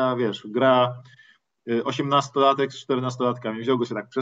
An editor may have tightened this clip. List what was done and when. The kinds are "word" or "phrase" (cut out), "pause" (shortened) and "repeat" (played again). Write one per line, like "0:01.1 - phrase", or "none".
none